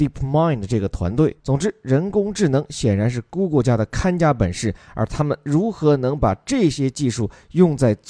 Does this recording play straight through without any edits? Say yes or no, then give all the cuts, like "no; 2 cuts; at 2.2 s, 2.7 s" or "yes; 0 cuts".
no; 1 cut; at 1.4 s